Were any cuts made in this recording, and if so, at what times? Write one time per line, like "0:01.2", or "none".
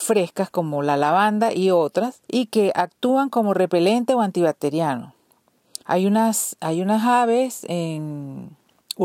0:02.2
0:05.8